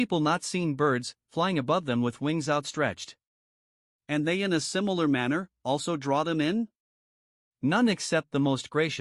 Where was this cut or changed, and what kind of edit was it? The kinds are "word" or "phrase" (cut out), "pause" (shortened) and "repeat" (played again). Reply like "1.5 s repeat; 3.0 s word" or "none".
none